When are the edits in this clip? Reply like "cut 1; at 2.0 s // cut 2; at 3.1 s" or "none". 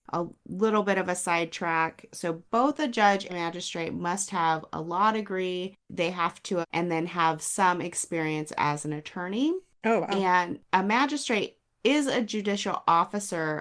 cut 1; at 3.3 s // cut 2; at 6.6 s